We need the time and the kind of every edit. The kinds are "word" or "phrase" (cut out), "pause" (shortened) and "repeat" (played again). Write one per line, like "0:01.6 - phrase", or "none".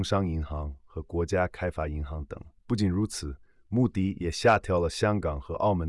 0:02.6 - pause